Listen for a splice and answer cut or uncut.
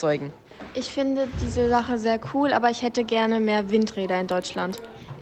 uncut